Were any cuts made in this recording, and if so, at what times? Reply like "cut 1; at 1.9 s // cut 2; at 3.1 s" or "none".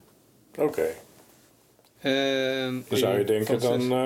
none